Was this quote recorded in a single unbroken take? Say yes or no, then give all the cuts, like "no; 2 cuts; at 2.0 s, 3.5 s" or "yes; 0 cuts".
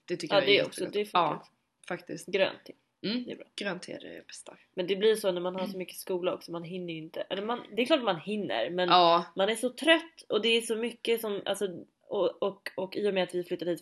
yes; 0 cuts